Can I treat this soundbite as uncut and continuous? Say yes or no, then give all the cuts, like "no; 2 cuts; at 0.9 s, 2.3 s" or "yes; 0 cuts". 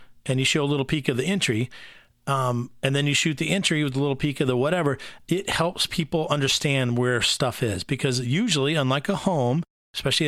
yes; 0 cuts